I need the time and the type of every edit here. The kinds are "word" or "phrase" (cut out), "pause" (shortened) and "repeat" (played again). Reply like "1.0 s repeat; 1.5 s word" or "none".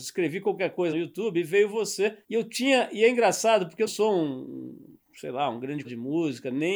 0.9 s phrase; 2.2 s pause; 3.9 s word; 5.8 s word